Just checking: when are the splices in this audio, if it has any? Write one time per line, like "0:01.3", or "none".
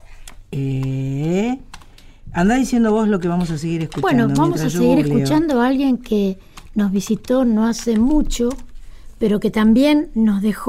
none